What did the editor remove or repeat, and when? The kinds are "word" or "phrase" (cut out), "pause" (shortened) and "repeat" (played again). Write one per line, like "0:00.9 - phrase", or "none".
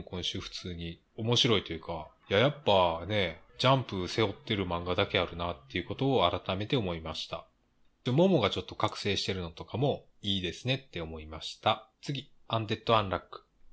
0:01.1 - pause
0:08.1 - phrase
0:10.1 - pause
0:11.9 - pause